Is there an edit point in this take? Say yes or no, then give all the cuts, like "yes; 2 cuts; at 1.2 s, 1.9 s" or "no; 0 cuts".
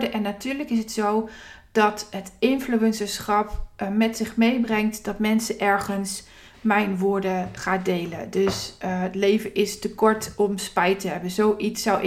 yes; 1 cut; at 7.6 s